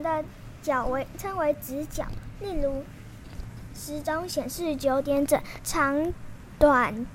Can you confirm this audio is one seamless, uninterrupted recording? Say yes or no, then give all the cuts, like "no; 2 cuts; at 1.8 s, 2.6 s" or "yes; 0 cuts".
no; 1 cut; at 5.6 s